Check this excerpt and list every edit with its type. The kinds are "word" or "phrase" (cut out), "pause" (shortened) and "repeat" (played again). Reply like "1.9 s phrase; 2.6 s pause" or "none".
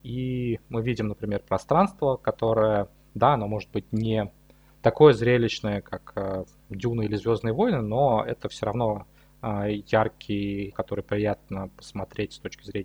10.7 s word